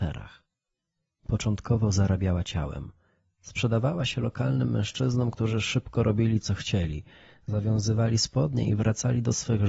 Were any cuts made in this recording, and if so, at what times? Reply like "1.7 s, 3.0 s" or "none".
none

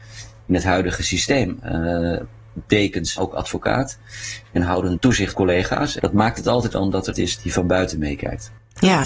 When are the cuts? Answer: 3.2 s, 5.0 s, 5.3 s, 6.0 s, 6.7 s, 7.1 s

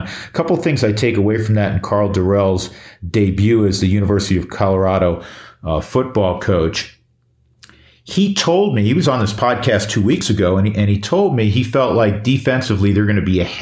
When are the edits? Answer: none

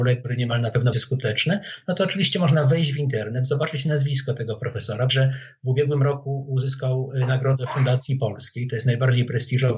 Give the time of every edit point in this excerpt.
0.9 s, 5.1 s, 8.1 s

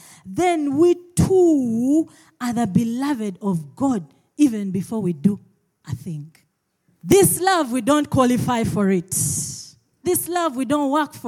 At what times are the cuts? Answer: none

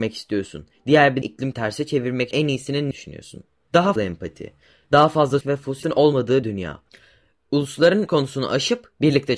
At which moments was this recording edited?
1.2 s, 1.5 s, 2.3 s, 2.9 s, 4.0 s, 5.4 s, 5.8 s, 6.4 s, 8.1 s

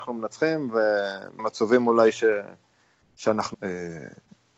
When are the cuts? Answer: 1.4 s, 3.5 s

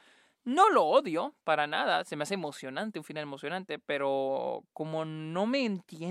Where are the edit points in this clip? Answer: none

